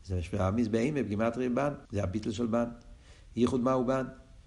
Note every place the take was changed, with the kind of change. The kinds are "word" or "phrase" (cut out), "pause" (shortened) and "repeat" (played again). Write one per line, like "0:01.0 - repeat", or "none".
0:01.8 - pause